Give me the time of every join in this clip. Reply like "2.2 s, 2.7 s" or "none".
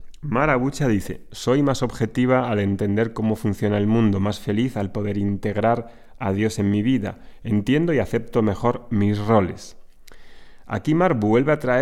none